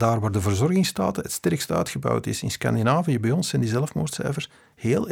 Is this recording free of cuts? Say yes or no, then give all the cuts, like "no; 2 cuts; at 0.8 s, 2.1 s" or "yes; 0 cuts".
yes; 0 cuts